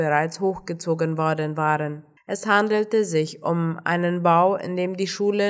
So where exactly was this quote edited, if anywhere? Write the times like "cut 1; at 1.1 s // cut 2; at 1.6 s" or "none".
cut 1; at 2.2 s